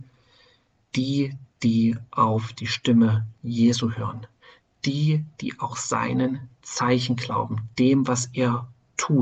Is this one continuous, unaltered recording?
yes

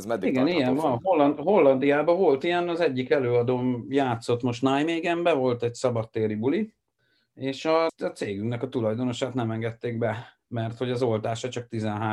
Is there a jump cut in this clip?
yes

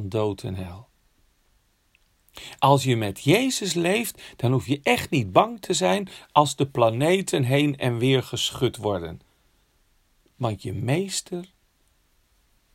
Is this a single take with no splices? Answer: yes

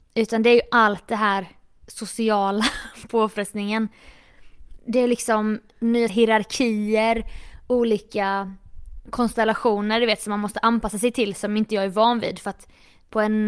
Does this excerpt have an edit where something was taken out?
yes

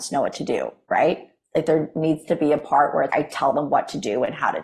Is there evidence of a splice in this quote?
yes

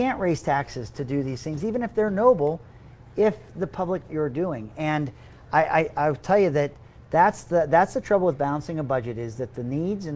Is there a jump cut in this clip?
yes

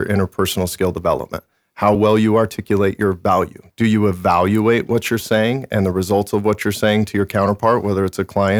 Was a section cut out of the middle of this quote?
no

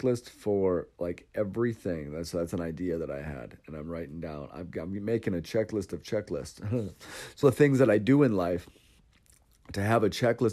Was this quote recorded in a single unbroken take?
no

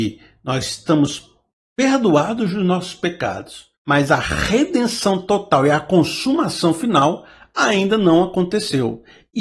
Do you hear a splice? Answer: yes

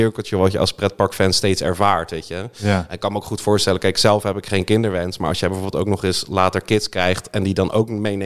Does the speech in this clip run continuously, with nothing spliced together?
yes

